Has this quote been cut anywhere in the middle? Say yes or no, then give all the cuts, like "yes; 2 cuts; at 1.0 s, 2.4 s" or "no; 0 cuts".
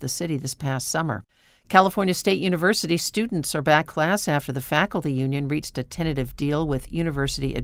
yes; 1 cut; at 3.9 s